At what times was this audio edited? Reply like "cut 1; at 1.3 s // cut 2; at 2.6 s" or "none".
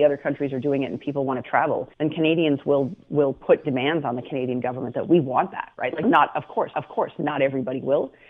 cut 1; at 1.9 s // cut 2; at 6.0 s // cut 3; at 6.7 s

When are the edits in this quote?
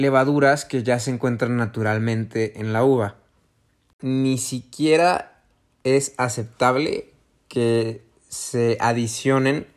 none

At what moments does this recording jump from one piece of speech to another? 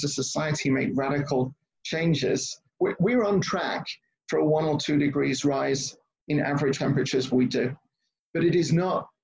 cut 1; at 6.8 s // cut 2; at 7.3 s

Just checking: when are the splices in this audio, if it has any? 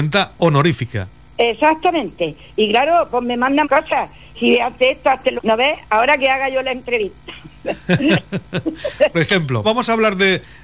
cut 1; at 3.6 s // cut 2; at 4.3 s // cut 3; at 5.4 s // cut 4; at 9.1 s // cut 5; at 9.6 s

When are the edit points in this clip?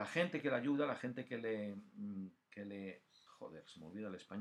cut 1; at 3.3 s

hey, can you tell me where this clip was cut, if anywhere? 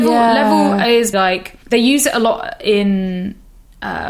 cut 1; at 1.1 s // cut 2; at 1.6 s

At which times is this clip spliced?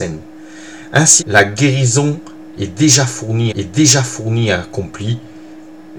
cut 1; at 1.2 s // cut 2; at 3.5 s

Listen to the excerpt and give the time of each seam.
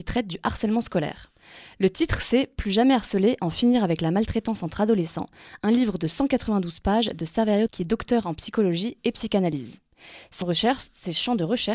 cut 1; at 7.7 s // cut 2; at 10.4 s

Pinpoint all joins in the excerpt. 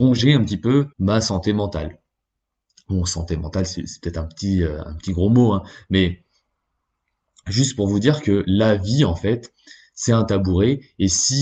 cut 1; at 0.9 s

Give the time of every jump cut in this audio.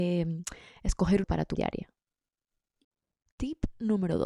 cut 1; at 1.2 s // cut 2; at 1.5 s

